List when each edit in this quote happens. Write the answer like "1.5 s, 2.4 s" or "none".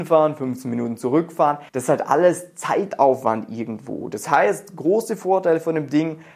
1.7 s